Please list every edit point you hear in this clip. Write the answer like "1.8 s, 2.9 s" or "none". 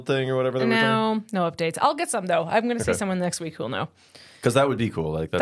none